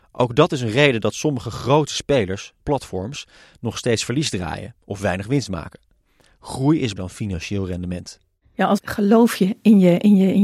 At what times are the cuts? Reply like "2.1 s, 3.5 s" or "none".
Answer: 2.6 s, 7.0 s, 8.8 s